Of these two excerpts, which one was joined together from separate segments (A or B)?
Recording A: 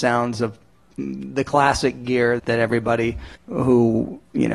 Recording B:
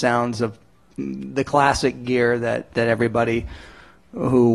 A